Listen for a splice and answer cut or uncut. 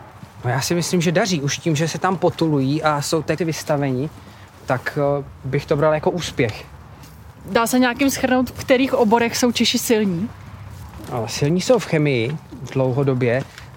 cut